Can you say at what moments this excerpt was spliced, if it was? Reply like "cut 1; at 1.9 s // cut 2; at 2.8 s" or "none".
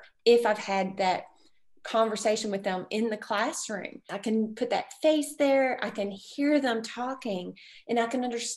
none

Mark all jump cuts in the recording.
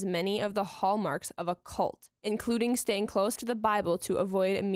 cut 1; at 2.2 s // cut 2; at 3.4 s

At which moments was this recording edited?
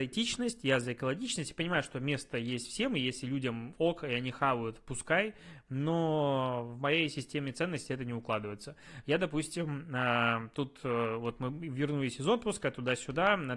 none

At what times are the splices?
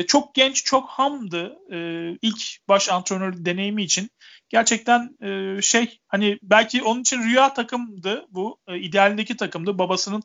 none

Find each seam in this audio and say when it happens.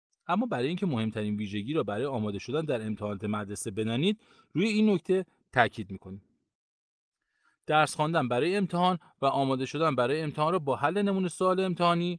none

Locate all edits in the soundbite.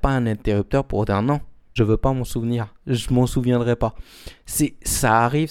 cut 1; at 1.8 s // cut 2; at 2.8 s

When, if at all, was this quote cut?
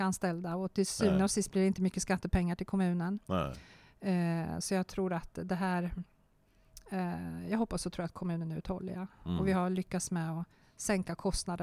none

